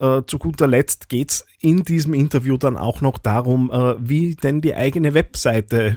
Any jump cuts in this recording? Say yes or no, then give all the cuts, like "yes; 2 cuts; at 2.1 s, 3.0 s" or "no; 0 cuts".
no; 0 cuts